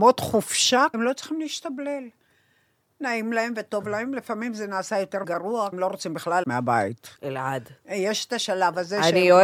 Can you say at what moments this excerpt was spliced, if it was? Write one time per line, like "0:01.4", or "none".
0:00.9
0:05.2
0:05.7
0:06.4
0:07.2